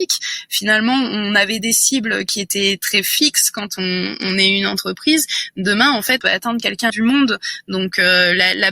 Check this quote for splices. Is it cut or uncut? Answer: cut